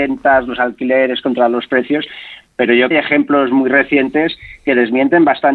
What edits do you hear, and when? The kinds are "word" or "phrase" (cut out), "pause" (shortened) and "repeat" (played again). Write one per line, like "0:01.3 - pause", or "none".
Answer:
0:02.9 - phrase